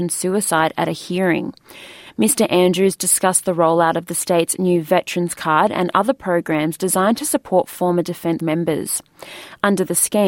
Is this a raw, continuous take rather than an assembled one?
no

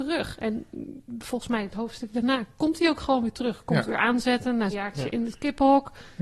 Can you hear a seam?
yes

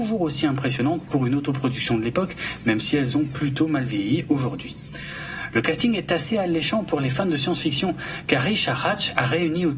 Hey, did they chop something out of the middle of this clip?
no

